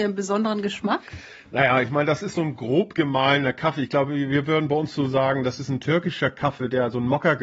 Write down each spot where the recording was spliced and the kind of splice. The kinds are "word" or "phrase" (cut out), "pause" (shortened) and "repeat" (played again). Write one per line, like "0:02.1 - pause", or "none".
none